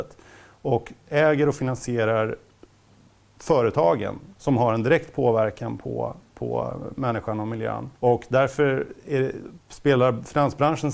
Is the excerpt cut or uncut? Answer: cut